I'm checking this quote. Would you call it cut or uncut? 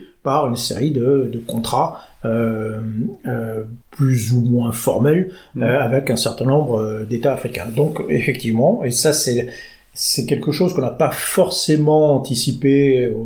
cut